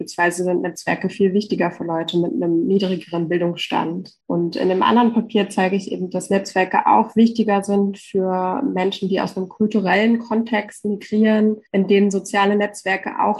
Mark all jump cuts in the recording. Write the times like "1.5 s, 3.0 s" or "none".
4.2 s, 11.7 s